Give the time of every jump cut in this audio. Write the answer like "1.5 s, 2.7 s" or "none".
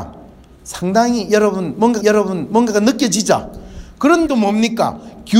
2.0 s, 4.3 s